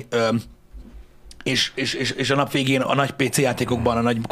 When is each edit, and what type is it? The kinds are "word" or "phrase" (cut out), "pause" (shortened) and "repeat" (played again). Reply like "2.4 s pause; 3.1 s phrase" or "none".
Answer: none